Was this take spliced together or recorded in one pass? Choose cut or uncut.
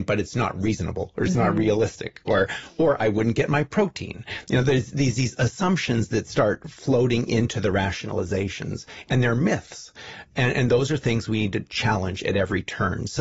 uncut